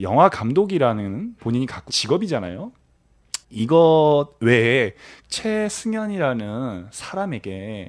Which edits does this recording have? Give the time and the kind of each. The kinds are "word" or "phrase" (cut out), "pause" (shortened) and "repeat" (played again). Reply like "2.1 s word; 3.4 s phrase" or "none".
1.4 s word; 1.9 s word; 3.4 s pause; 5.2 s word